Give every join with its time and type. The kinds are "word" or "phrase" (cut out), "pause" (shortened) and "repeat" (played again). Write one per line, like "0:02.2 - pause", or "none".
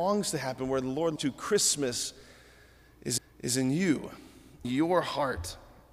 0:01.2 - word
0:03.2 - repeat
0:04.6 - word